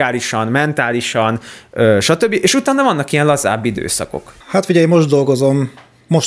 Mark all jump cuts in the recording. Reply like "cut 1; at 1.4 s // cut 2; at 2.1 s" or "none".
cut 1; at 4.4 s